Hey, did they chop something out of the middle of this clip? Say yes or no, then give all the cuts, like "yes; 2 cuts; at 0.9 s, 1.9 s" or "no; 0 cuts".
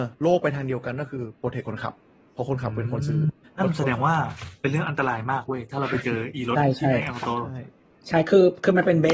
no; 0 cuts